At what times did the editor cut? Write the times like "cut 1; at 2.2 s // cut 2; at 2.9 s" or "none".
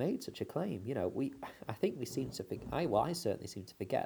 none